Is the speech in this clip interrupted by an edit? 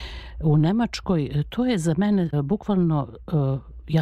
yes; 1 cut; at 2.3 s

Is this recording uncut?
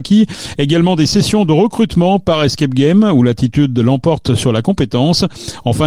yes; 0 cuts

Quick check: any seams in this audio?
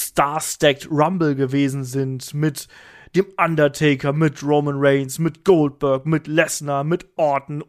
no; 0 cuts

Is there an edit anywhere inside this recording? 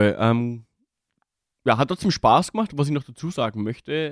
no; 0 cuts

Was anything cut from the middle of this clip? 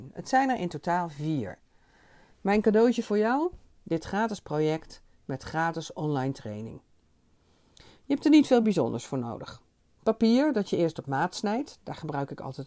no; 0 cuts

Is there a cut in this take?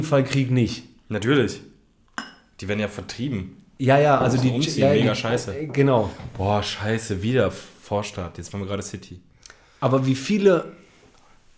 no; 0 cuts

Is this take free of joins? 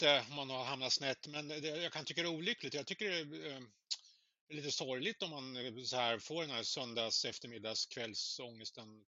yes; 0 cuts

